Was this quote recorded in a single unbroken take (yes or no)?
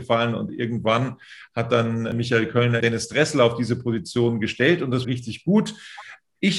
no